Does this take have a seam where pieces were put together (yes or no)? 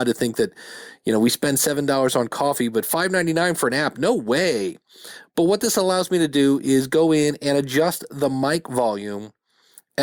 no